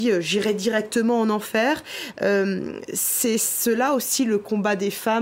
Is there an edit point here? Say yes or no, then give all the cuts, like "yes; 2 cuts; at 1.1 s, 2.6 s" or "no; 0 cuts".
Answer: no; 0 cuts